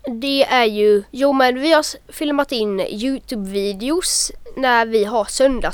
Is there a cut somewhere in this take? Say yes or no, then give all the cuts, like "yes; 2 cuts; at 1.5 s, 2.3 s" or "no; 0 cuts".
yes; 1 cut; at 1.1 s